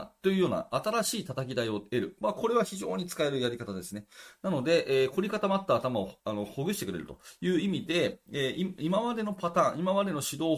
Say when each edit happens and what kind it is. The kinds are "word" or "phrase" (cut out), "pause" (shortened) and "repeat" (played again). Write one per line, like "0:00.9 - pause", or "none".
0:06.2 - pause